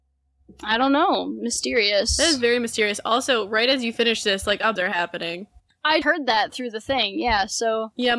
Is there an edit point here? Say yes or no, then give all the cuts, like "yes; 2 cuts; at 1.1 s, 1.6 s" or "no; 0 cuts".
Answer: yes; 2 cuts; at 4.8 s, 6.0 s